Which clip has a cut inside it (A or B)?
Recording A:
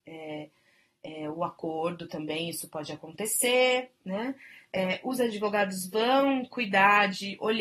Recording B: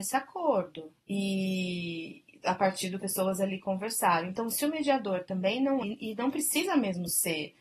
B